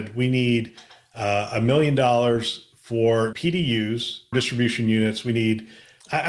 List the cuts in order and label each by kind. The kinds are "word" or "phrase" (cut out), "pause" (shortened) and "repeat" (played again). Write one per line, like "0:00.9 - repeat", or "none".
0:03.3 - word
0:04.3 - word